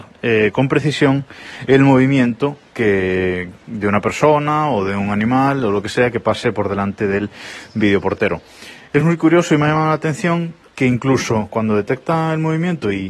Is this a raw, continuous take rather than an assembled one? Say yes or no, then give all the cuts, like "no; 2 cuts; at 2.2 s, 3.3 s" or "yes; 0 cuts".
yes; 0 cuts